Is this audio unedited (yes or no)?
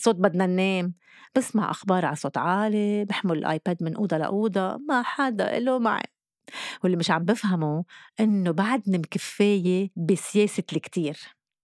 yes